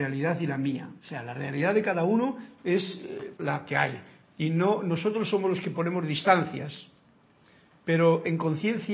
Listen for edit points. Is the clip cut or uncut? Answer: cut